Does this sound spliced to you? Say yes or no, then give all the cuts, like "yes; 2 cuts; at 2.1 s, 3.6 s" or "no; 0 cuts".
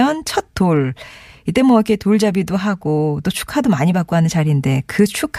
no; 0 cuts